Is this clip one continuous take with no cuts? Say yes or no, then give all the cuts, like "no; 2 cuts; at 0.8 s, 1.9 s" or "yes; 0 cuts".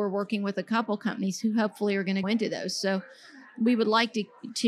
no; 1 cut; at 2.2 s